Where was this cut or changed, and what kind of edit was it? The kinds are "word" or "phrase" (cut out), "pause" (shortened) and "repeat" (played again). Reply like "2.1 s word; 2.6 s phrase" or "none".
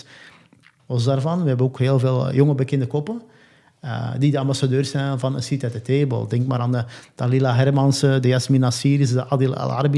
none